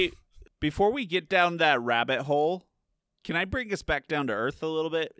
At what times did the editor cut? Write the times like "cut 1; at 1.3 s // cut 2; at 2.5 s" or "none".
none